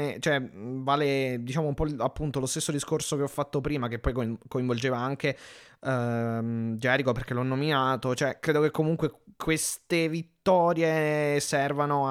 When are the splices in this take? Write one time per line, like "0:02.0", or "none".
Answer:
none